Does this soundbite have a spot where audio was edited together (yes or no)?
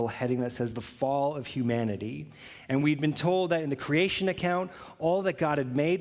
no